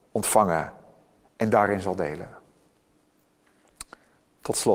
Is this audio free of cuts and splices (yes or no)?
yes